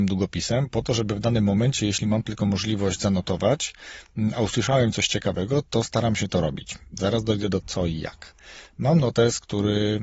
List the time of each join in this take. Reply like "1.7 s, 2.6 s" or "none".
7.6 s